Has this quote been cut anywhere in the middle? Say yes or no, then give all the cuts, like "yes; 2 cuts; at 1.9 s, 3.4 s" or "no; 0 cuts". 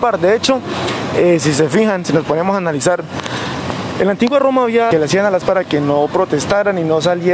yes; 2 cuts; at 4.9 s, 5.4 s